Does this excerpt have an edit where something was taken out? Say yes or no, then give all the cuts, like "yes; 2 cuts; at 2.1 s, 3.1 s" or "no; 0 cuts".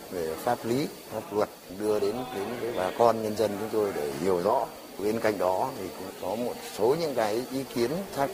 no; 0 cuts